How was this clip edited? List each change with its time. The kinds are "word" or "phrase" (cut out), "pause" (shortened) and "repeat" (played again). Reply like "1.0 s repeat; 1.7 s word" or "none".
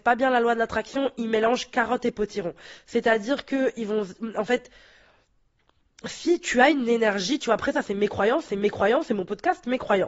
8.5 s repeat